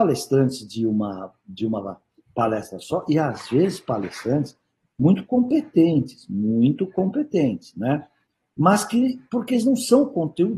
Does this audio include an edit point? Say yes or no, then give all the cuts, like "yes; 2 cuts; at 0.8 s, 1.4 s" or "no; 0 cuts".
no; 0 cuts